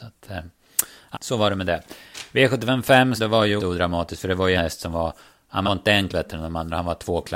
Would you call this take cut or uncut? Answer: cut